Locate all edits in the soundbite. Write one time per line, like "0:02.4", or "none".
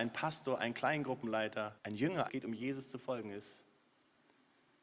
0:01.8
0:02.3